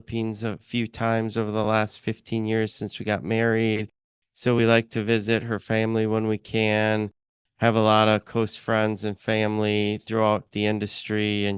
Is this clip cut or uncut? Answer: uncut